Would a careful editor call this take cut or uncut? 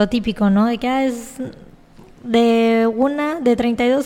uncut